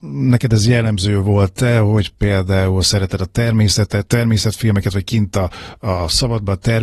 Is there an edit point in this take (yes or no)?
yes